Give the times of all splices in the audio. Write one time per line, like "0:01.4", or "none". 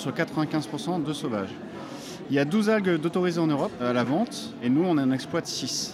none